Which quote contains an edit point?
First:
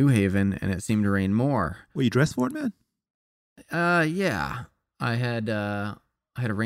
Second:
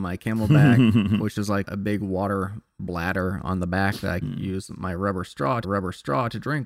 second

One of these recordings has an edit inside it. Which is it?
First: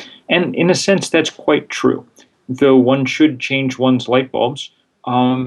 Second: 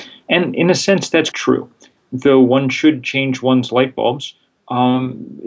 second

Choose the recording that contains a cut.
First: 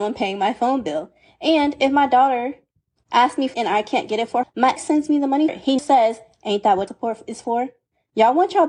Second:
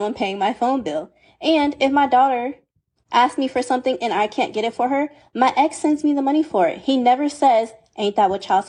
first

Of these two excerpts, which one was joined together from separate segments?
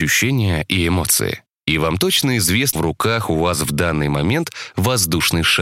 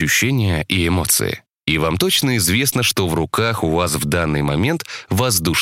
first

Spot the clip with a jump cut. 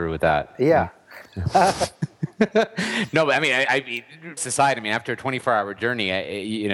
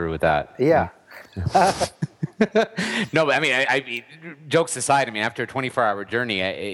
first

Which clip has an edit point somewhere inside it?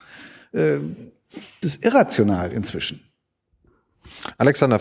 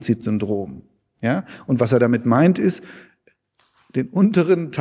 first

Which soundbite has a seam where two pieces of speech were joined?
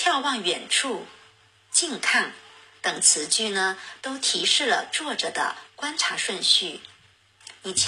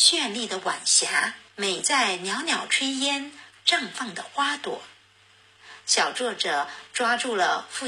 second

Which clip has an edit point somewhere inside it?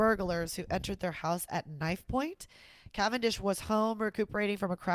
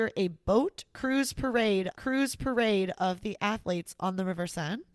second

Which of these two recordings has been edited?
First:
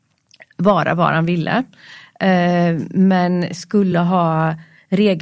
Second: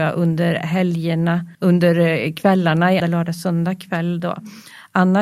second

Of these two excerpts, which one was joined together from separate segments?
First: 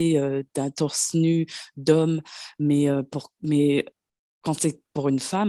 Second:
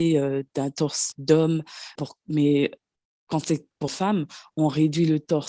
second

